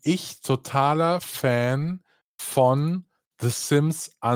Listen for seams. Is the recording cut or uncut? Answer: uncut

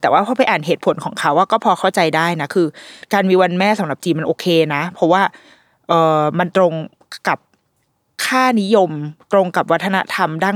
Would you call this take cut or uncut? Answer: uncut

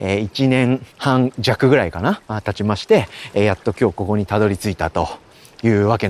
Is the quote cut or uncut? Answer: cut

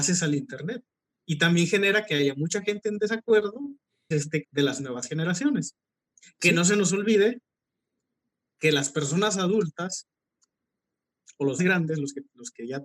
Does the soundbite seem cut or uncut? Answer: cut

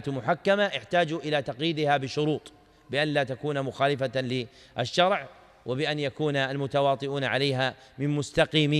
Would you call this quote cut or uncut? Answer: uncut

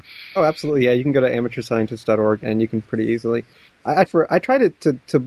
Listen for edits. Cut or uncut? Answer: cut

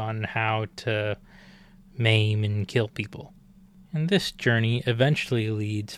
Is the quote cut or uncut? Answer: uncut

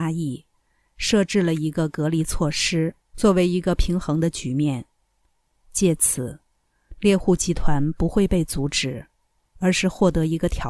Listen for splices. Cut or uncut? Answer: cut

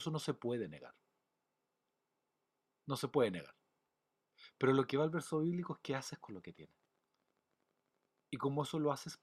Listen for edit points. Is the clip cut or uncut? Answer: uncut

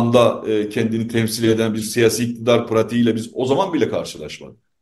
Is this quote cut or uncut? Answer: uncut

